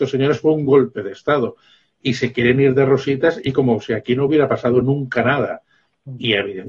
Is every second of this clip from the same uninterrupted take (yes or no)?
yes